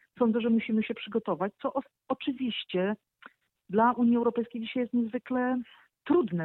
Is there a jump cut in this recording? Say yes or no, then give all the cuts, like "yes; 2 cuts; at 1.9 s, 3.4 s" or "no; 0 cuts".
no; 0 cuts